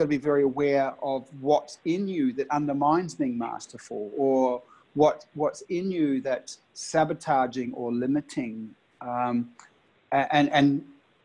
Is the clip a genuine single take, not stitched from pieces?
yes; 0 cuts

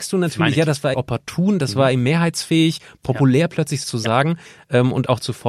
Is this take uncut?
no; 2 cuts; at 0.9 s, 3.8 s

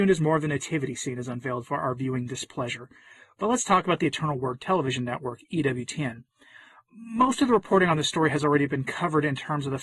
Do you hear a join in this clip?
no; 0 cuts

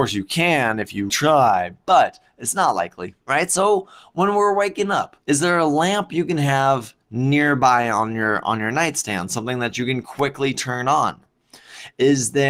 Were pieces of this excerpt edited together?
yes; 3 cuts; at 1.1 s, 3.2 s, 5.2 s

